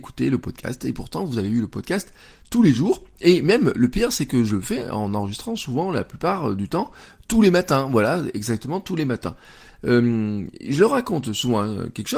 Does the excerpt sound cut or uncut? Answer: uncut